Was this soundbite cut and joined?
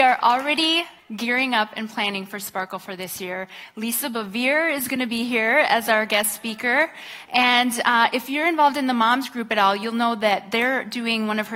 no; 0 cuts

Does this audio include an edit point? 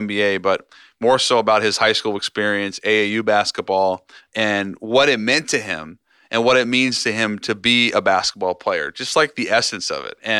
yes; 1 cut; at 4.2 s

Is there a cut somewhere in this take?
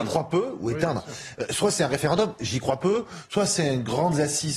no; 0 cuts

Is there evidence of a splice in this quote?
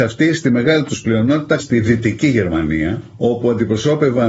yes; 1 cut; at 1.6 s

